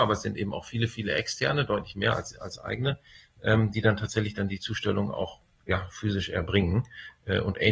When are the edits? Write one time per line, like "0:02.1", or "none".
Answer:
none